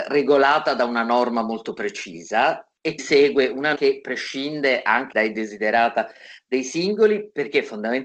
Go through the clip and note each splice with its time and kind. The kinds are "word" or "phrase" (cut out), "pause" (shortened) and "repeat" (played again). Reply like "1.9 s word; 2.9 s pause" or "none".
3.0 s word; 3.8 s word; 5.1 s word